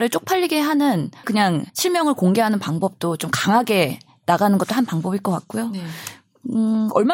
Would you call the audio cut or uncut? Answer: cut